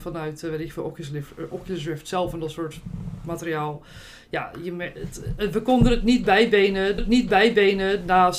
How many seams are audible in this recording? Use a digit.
1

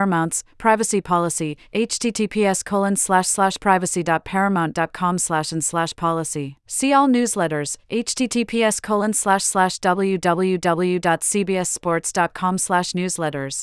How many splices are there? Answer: 1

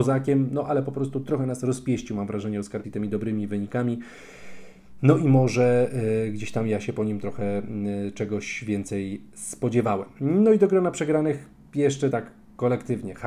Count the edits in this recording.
2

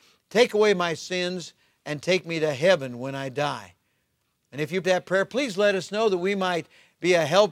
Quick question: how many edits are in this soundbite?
1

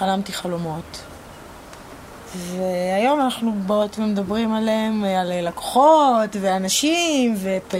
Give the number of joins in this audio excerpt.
0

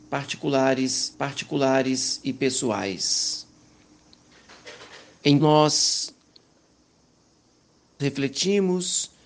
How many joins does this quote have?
3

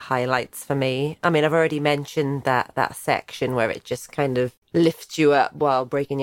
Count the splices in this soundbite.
1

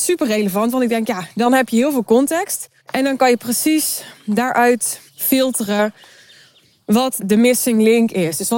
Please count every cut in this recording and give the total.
3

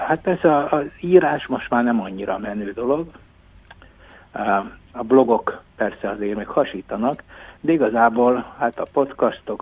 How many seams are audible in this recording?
1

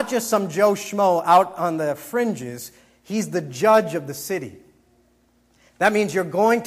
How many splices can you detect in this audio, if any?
0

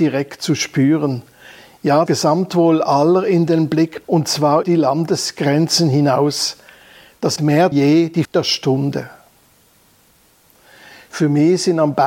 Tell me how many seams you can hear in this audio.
6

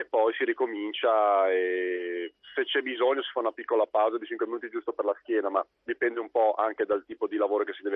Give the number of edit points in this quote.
2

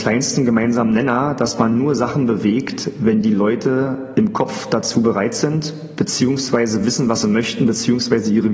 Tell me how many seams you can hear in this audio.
0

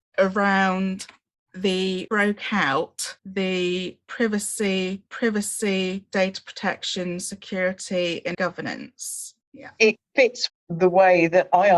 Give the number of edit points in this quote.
6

